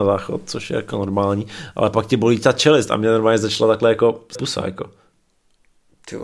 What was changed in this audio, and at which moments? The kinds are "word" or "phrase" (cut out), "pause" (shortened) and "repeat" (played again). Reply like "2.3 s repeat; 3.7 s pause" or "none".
4.4 s word